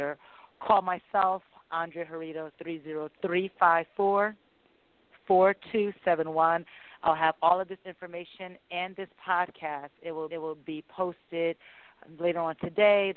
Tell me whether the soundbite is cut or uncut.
cut